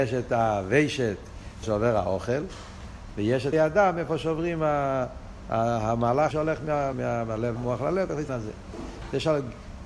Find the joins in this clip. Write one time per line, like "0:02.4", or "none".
0:01.6
0:03.5
0:06.3
0:06.9
0:07.6
0:08.3